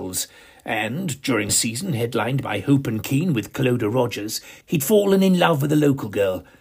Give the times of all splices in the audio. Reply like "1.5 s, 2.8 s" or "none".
1.5 s, 4.6 s

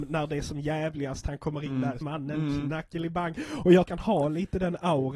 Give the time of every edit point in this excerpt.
2.0 s, 3.9 s

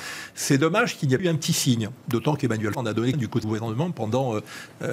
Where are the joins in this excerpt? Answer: 1.2 s, 2.7 s, 3.1 s, 3.4 s

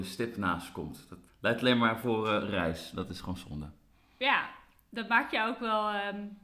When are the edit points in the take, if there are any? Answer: 1.3 s

